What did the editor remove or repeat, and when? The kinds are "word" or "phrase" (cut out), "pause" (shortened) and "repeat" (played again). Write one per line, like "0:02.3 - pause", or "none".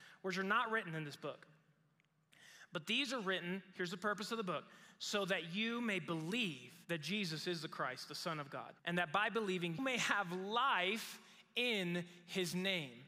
0:06.8 - pause
0:08.8 - pause
0:09.8 - word